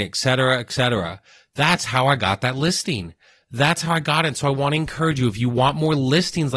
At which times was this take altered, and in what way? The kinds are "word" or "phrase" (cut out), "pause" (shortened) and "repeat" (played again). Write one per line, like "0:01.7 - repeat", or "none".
none